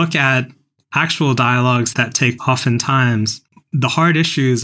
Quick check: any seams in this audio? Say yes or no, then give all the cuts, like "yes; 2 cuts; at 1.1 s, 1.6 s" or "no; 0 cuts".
yes; 3 cuts; at 1.9 s, 2.4 s, 3.5 s